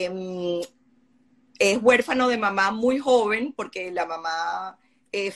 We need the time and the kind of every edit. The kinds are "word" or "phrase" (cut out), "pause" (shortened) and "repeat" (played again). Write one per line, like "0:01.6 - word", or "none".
none